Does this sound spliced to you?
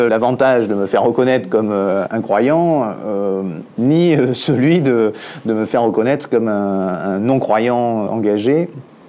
no; 0 cuts

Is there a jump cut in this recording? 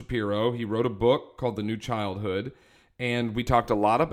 no; 0 cuts

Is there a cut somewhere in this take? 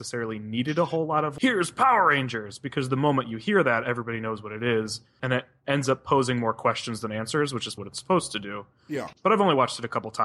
yes; 1 cut; at 7.8 s

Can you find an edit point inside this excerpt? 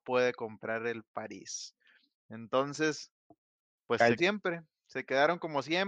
yes; 2 cuts; at 3.6 s, 4.2 s

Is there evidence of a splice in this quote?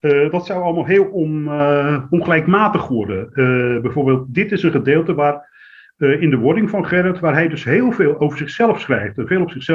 no; 0 cuts

